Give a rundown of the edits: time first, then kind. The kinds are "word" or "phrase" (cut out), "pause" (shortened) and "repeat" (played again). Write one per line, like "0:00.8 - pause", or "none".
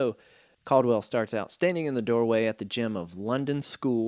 none

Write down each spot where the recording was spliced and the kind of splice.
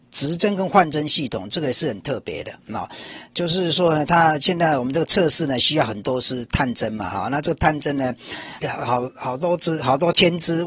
0:08.6 - word

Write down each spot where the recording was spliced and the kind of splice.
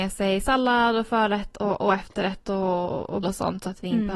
0:03.2 - word

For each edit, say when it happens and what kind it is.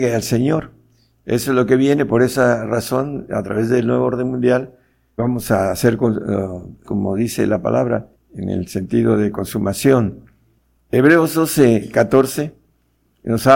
0:05.2 - word
0:06.8 - phrase
0:08.1 - pause

